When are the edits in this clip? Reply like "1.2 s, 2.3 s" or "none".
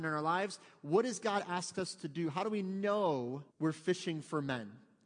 3.5 s